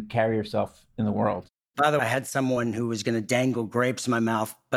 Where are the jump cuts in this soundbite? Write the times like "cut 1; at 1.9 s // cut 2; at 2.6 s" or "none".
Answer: cut 1; at 2.0 s